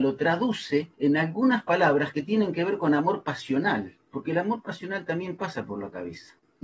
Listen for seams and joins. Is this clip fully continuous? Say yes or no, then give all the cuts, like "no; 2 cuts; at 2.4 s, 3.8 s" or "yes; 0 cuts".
no; 2 cuts; at 0.9 s, 4.0 s